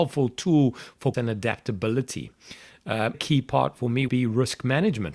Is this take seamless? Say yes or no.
no